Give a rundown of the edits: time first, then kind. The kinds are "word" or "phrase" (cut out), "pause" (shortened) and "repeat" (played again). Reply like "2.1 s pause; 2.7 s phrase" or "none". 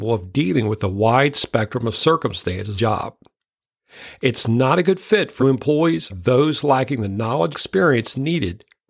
2.8 s phrase; 5.4 s word; 6.1 s word; 7.5 s word